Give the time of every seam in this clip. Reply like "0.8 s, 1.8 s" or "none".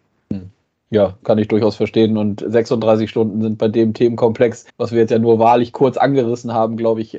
4.7 s